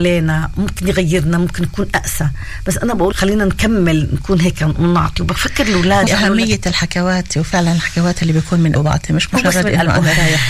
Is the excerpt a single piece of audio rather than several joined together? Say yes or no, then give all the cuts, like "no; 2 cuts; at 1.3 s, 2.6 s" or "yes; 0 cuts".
no; 3 cuts; at 3.1 s, 6.1 s, 8.7 s